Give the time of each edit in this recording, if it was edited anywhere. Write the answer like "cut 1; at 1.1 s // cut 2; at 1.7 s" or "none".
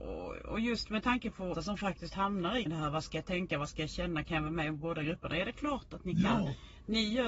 cut 1; at 1.5 s // cut 2; at 2.7 s

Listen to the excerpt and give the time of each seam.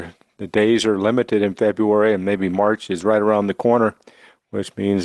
none

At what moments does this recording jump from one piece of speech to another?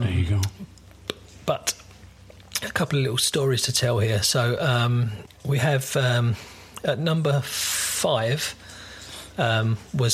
none

